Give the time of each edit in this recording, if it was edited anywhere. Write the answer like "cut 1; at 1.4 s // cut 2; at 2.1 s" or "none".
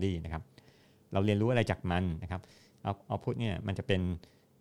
none